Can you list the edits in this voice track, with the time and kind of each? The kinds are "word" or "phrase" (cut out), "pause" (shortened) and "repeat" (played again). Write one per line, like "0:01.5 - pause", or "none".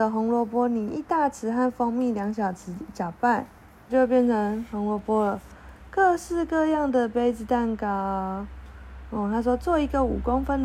0:03.9 - word